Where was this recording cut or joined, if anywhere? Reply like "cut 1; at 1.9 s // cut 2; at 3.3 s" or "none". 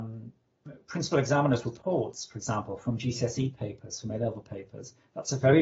none